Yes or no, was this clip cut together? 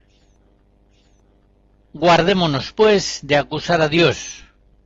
no